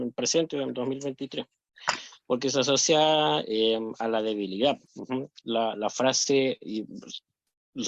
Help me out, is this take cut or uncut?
cut